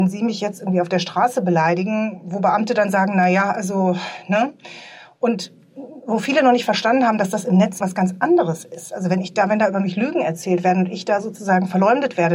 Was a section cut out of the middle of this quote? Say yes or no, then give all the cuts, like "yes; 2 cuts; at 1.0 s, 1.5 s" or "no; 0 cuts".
yes; 1 cut; at 7.8 s